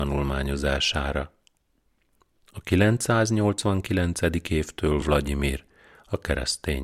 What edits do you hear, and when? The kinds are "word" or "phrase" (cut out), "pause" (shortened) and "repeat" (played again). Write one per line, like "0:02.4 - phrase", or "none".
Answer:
none